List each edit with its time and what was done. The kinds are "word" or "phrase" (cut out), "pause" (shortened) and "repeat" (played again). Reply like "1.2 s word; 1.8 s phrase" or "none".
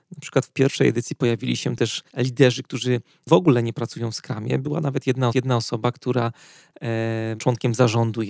2.1 s pause; 5.3 s repeat; 7.4 s word